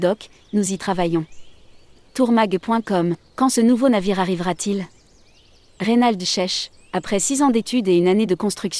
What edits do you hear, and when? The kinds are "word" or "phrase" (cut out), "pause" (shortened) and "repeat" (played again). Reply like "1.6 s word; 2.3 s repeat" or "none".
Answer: none